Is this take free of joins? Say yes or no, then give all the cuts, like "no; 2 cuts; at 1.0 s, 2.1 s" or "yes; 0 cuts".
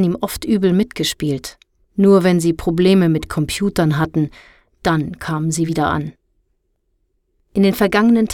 yes; 0 cuts